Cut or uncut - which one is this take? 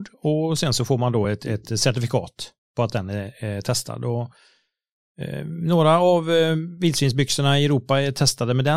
uncut